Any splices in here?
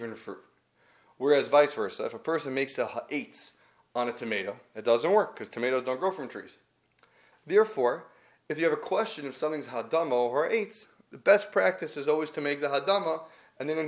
no; 0 cuts

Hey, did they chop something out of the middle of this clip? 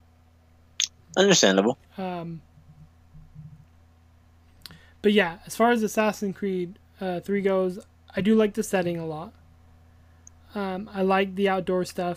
yes; 1 cut; at 1.8 s

